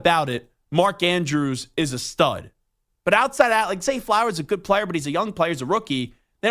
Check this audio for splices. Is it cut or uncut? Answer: uncut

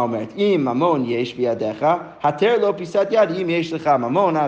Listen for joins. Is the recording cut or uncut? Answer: uncut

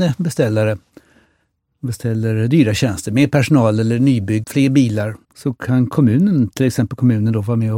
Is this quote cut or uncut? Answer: cut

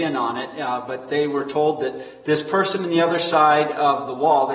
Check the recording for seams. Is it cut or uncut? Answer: uncut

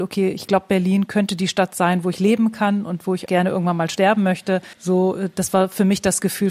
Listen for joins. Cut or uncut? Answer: cut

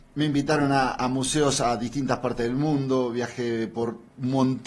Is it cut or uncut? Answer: uncut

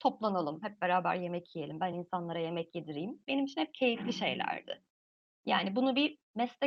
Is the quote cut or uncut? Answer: uncut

